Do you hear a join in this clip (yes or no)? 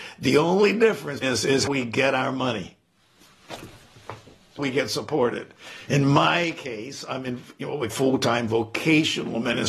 yes